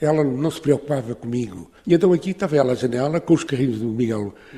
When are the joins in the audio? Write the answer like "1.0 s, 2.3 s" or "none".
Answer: 1.8 s